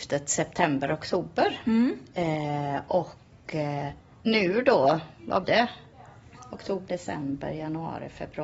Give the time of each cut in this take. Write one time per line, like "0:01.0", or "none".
0:04.0
0:05.4
0:06.9